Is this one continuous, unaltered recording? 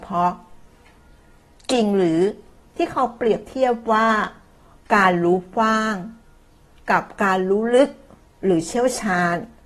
yes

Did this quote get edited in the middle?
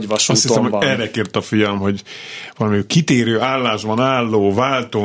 no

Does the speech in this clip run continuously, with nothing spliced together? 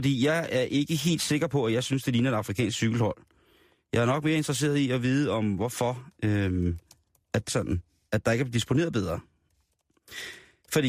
no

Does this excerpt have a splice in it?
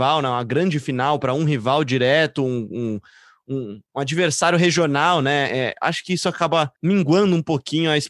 yes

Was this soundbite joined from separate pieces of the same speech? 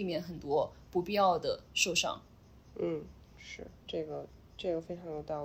no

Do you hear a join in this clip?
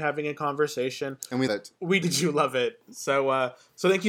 yes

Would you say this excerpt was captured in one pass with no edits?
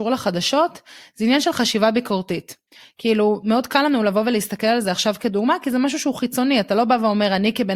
yes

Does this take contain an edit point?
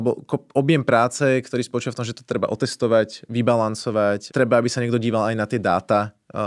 yes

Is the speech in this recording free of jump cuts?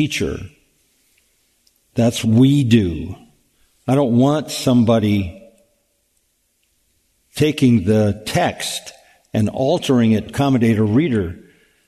no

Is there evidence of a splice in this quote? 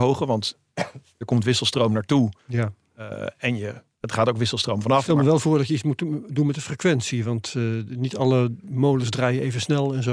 yes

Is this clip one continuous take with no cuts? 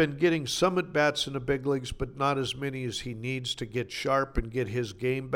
yes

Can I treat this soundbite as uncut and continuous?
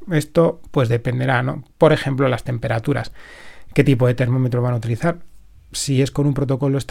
yes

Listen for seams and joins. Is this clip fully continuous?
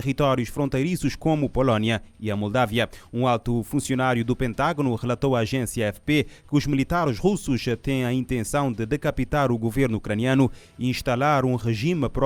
yes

